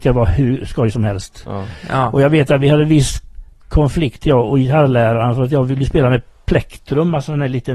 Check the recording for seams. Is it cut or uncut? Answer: uncut